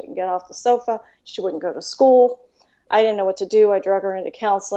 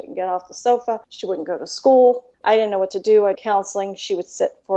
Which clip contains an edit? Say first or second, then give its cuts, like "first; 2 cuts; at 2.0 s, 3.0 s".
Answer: second; 3 cuts; at 1.0 s, 2.3 s, 3.3 s